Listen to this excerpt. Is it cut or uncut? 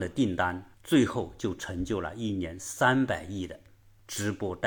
uncut